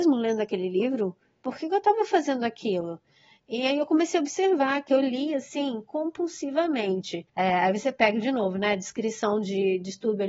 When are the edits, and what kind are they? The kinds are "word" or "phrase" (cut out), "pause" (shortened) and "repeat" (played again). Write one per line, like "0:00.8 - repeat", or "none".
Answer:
0:07.3 - pause